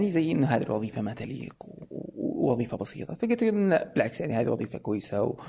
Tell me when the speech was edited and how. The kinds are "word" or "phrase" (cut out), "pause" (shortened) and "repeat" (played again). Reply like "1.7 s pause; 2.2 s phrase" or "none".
none